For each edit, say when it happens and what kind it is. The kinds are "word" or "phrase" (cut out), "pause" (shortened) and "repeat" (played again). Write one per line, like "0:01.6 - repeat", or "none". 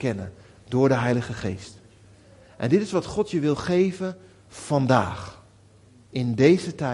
none